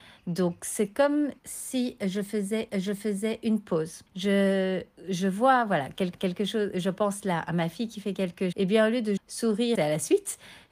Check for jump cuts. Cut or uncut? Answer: cut